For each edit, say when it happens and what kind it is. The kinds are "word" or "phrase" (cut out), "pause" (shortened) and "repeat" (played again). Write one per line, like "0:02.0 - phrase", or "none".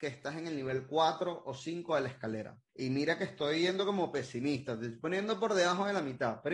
0:02.7 - pause